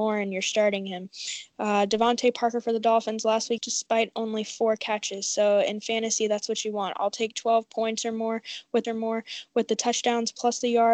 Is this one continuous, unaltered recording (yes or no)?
no